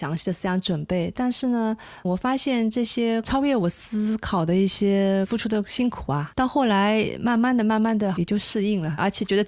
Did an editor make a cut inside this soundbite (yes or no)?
yes